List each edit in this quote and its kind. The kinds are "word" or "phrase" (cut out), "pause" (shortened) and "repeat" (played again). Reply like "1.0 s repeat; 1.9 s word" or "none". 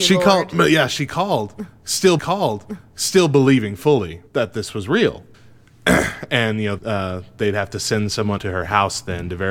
2.2 s repeat; 4.3 s pause; 5.3 s pause; 6.8 s phrase; 8.4 s word

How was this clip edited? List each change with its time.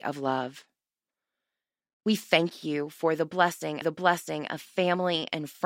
3.8 s repeat

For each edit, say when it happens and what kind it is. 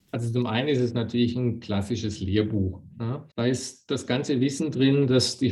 3.3 s pause

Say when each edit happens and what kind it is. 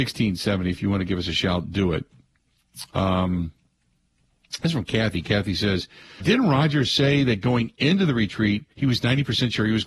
6.2 s word; 8.7 s pause

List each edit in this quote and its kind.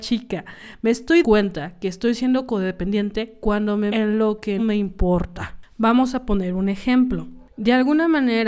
1.2 s word; 3.9 s word; 4.6 s word

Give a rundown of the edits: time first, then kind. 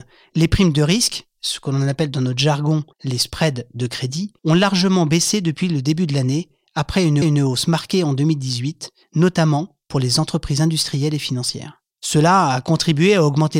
2.9 s pause; 4.4 s pause; 7.2 s repeat; 11.9 s pause

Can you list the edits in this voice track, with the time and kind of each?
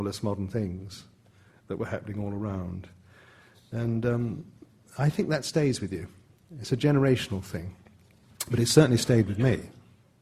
none

